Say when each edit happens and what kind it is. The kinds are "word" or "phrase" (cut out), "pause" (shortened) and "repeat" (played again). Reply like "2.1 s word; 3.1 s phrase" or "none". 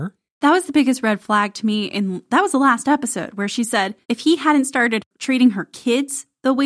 4.0 s pause